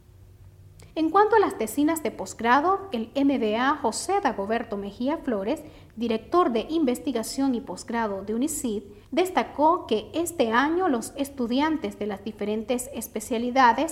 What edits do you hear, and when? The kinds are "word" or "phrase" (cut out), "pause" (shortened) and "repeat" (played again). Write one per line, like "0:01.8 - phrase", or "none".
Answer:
0:00.9 - pause
0:09.0 - pause